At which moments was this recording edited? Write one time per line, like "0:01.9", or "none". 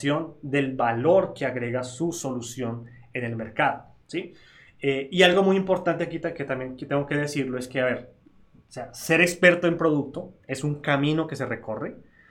none

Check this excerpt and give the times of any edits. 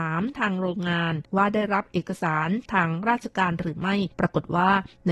0:01.2
0:04.1

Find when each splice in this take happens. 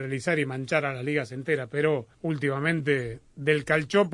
0:02.1

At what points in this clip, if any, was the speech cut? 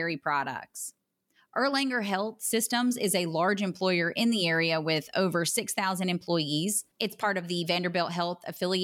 0:06.9

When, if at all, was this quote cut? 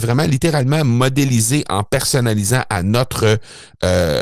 none

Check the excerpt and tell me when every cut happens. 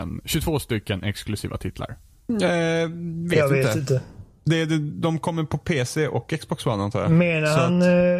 none

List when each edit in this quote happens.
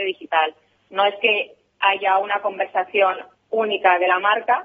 none

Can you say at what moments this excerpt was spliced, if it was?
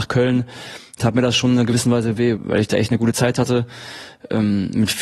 0:02.4

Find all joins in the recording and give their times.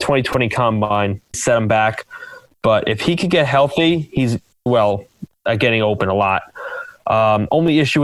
0:01.3
0:04.7

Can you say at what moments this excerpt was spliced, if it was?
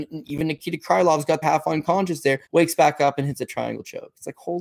0:01.4
0:02.4

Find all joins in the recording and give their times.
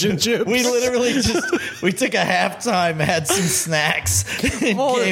none

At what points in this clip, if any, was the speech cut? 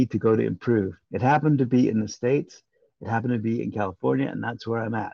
0:01.0

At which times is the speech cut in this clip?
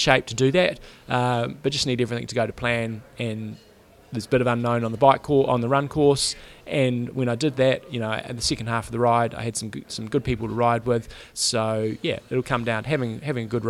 none

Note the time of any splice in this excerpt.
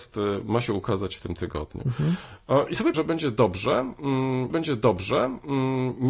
0:02.9
0:04.5

